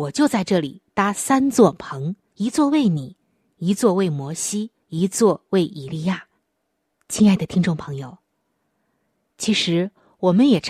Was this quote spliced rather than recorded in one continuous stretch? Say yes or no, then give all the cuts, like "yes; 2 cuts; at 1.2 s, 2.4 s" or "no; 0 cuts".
yes; 3 cuts; at 2.3 s, 4.8 s, 6.4 s